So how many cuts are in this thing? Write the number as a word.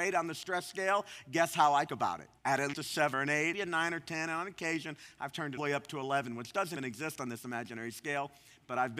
seven